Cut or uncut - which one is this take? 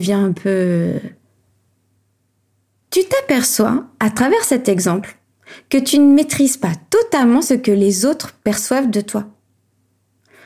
uncut